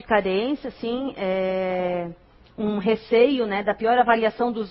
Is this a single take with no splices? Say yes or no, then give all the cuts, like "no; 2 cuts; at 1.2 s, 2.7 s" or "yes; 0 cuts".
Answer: yes; 0 cuts